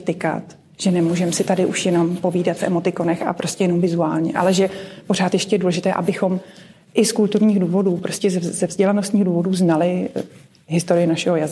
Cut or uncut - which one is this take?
uncut